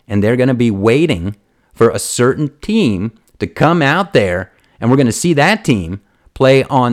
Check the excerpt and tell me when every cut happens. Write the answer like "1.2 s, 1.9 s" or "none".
none

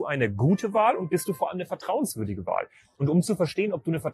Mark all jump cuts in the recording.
none

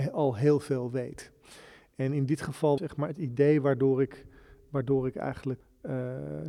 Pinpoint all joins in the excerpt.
2.8 s

